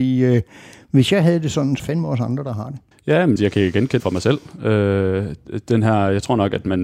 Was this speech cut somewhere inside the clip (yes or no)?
yes